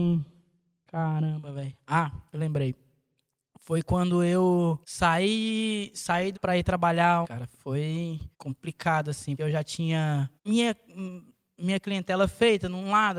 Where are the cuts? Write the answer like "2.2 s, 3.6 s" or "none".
2.3 s, 4.8 s, 6.3 s, 7.2 s, 8.3 s, 9.4 s, 10.4 s